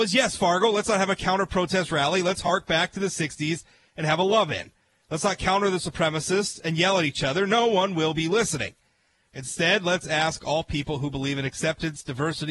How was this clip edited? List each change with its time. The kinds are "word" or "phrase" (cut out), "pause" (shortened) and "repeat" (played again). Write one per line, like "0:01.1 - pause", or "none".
none